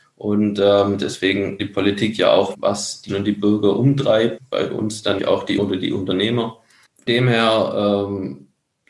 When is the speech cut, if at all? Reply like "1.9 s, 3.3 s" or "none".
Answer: 1.6 s, 2.5 s, 3.1 s, 4.4 s, 5.2 s, 5.6 s, 7.1 s